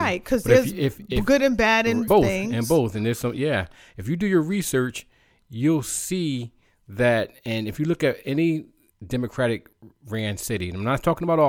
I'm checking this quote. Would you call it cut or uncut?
cut